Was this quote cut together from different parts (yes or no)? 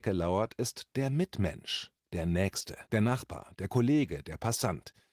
yes